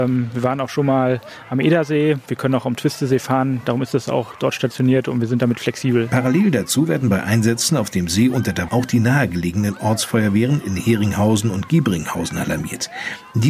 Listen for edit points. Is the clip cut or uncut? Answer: cut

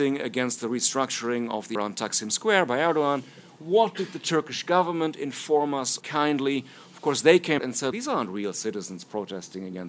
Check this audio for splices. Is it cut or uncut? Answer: cut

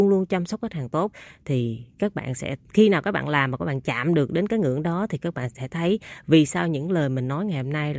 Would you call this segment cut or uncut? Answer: uncut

